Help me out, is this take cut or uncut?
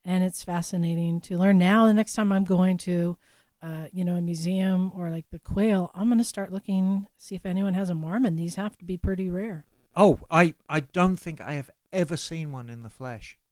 uncut